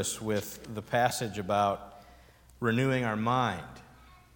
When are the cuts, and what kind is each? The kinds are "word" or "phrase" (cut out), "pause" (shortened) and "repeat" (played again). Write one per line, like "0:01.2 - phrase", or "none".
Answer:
none